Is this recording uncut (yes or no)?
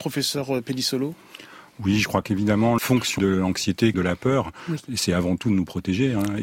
no